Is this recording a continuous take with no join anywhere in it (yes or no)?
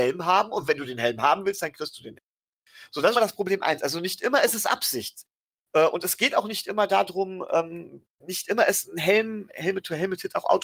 no